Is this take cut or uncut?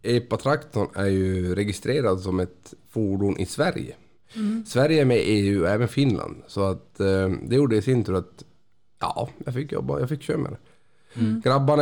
uncut